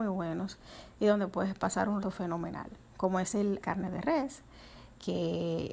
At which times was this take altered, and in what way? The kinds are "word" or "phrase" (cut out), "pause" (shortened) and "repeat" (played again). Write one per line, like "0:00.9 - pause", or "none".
0:02.0 - word
0:03.6 - word